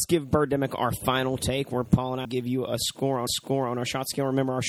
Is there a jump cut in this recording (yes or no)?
yes